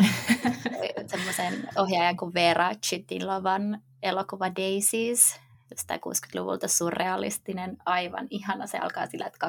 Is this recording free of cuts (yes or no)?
yes